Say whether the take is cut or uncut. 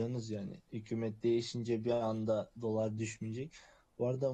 uncut